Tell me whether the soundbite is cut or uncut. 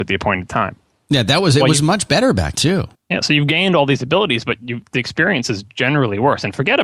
cut